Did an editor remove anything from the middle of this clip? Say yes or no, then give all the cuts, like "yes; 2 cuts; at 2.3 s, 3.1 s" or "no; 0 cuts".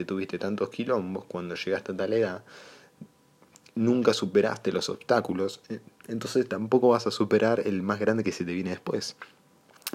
no; 0 cuts